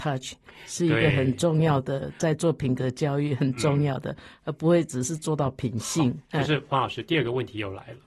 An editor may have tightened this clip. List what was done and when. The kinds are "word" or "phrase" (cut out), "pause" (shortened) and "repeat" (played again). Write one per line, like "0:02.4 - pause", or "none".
0:06.3 - pause